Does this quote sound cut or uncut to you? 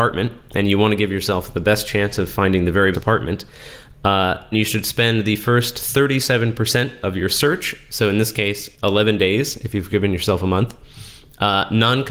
cut